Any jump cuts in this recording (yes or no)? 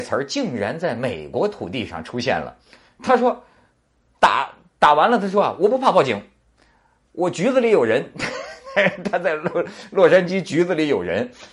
no